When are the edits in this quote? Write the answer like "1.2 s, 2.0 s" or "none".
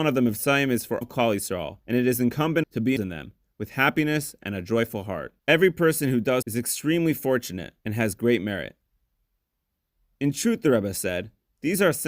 1.0 s, 1.8 s, 2.6 s, 3.0 s, 5.4 s, 6.4 s, 7.8 s